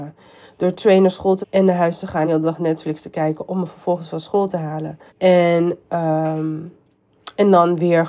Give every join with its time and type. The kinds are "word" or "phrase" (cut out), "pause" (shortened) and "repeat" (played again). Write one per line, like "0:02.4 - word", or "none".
0:01.4 - word
0:02.2 - word
0:05.1 - pause